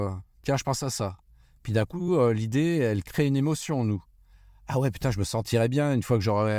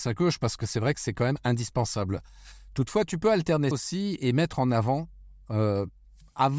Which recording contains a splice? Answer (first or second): second